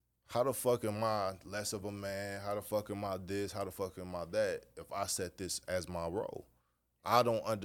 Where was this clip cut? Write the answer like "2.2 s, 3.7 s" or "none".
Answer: none